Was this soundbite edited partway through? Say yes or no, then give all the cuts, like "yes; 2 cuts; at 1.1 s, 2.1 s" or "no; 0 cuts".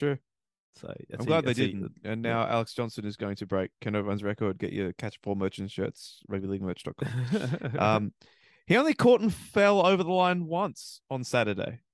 no; 0 cuts